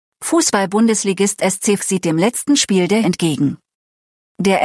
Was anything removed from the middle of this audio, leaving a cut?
yes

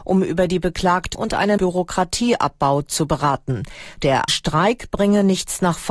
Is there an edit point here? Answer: yes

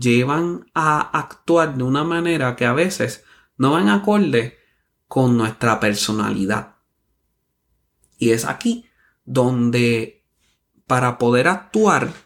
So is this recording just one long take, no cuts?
yes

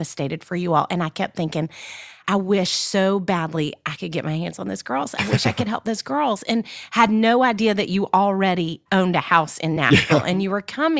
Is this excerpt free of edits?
yes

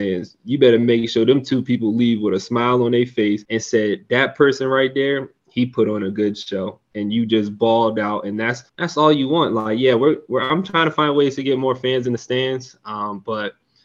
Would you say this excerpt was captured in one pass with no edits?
no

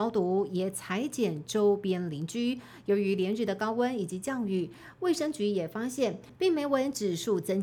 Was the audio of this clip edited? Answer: yes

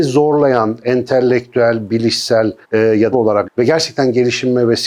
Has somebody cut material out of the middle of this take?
yes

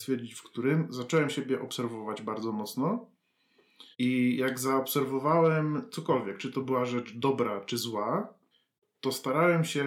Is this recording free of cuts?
no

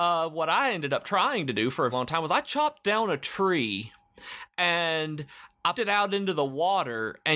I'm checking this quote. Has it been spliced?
yes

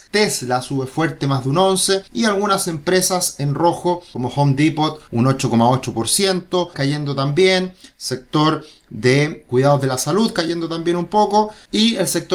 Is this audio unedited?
no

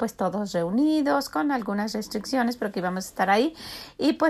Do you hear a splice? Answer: no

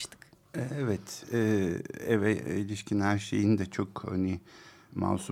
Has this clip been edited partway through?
no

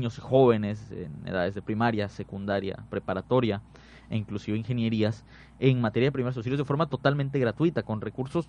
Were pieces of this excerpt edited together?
no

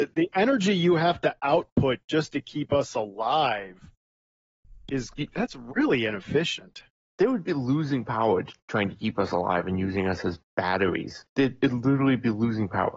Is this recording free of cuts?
no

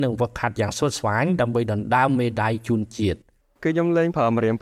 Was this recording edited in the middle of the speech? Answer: no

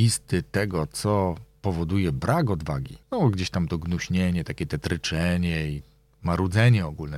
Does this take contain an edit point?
yes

